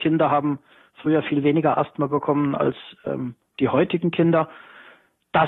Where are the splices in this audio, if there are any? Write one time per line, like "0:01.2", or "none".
none